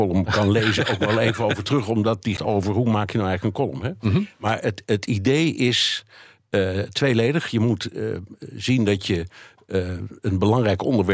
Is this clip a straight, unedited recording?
no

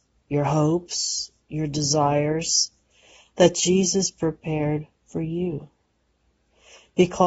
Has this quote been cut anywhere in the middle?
no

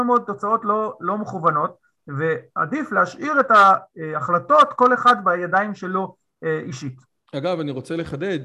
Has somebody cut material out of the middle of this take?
no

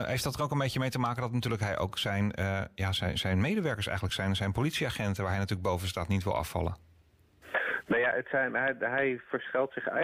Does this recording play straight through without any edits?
yes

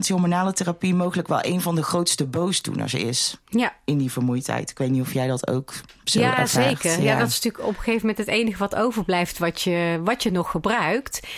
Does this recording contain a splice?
no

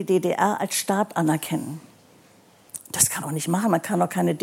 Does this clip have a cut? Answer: yes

